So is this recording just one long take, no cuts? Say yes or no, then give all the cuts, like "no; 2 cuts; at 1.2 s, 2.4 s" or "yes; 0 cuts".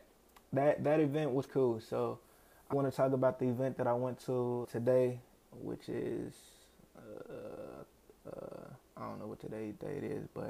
no; 4 cuts; at 1.5 s, 2.7 s, 4.6 s, 8.8 s